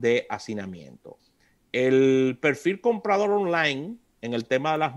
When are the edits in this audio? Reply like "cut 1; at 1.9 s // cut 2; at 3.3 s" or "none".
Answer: none